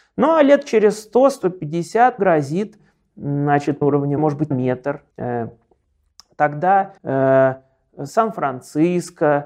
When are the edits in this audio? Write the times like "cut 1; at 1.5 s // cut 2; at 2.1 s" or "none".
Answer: cut 1; at 2.2 s // cut 2; at 3.8 s // cut 3; at 4.2 s // cut 4; at 4.5 s // cut 5; at 5.1 s // cut 6; at 7.0 s